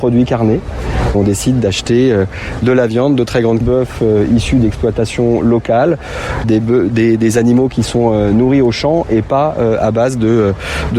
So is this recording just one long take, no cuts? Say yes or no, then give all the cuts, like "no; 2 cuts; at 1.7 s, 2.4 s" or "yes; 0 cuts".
no; 3 cuts; at 1.1 s, 3.6 s, 6.4 s